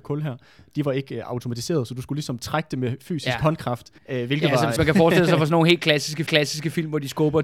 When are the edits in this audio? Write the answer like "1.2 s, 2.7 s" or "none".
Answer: 4.0 s, 4.8 s, 6.3 s